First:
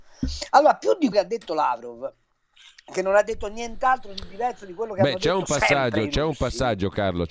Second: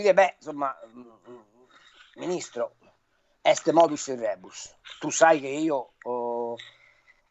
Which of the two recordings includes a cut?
first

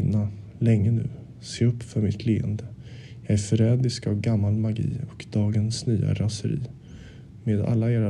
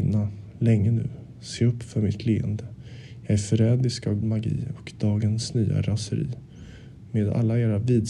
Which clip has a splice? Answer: second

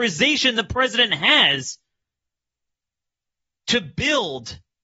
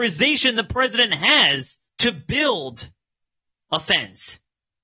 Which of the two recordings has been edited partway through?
second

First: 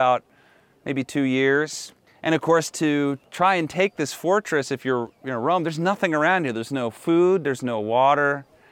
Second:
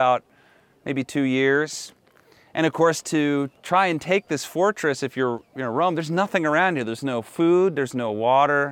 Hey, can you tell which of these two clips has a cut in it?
first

